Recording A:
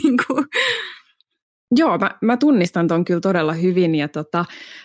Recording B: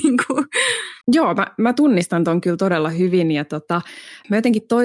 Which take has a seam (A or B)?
B